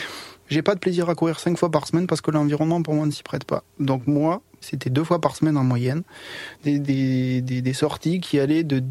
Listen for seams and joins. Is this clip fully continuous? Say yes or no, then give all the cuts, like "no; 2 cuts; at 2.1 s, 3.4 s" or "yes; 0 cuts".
yes; 0 cuts